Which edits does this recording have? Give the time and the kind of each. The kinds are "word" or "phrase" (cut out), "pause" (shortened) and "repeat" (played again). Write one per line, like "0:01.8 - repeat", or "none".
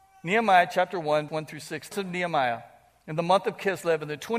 0:01.3 - word
0:01.9 - word